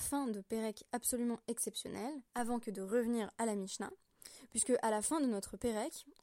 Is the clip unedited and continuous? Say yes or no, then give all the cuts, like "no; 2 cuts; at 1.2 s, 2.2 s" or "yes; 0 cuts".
no; 1 cut; at 2.3 s